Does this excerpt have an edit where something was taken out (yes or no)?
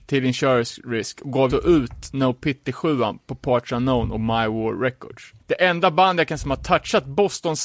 yes